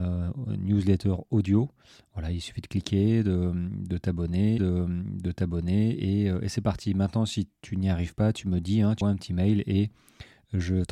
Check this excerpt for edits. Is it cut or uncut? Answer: cut